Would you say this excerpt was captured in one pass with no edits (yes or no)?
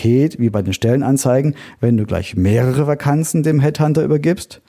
yes